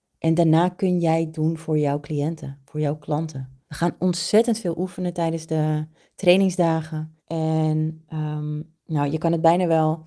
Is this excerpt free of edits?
no; 4 cuts; at 1.3 s, 3.6 s, 7.2 s, 8.8 s

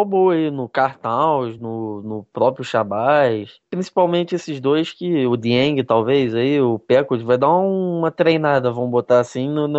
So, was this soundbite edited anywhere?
no; 0 cuts

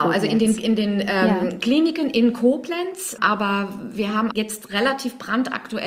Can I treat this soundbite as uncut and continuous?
no; 2 cuts; at 3.2 s, 4.3 s

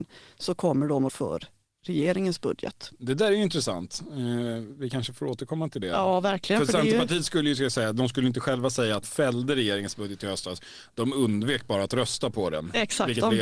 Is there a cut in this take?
yes; 2 cuts; at 1.1 s, 9.0 s

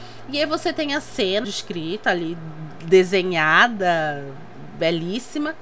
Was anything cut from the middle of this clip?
yes; 1 cut; at 1.4 s

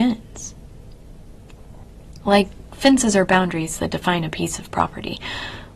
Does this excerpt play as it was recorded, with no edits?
yes; 0 cuts

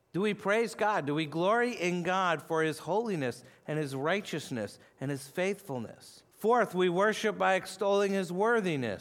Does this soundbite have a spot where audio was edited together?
yes; 1 cut; at 6.3 s

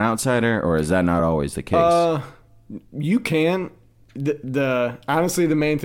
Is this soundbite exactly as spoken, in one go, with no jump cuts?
yes; 0 cuts

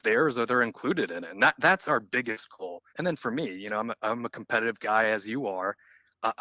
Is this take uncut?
no; 1 cut; at 2.9 s

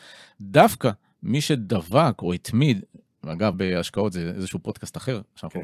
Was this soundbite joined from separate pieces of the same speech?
yes; 1 cut; at 3.5 s

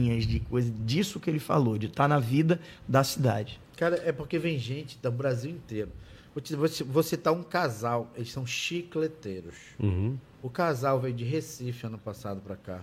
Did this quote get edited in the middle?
no; 0 cuts

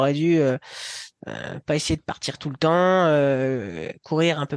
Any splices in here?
no; 0 cuts

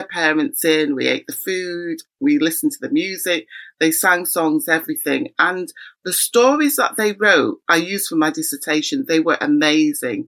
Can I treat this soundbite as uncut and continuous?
yes; 0 cuts

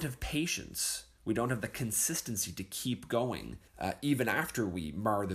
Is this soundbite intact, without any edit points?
no; 1 cut; at 3.7 s

